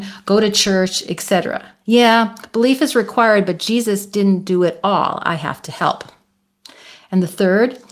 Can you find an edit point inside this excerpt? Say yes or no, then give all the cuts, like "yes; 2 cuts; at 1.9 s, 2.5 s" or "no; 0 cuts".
yes; 1 cut; at 1.8 s